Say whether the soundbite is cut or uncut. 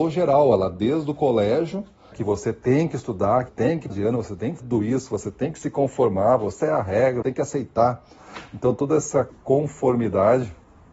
cut